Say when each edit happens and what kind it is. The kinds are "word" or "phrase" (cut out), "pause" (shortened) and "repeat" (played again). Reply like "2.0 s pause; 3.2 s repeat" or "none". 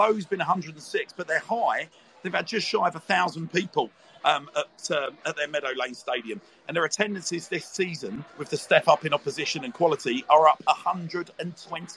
8.3 s pause